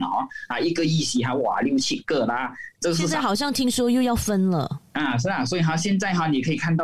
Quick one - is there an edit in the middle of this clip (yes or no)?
yes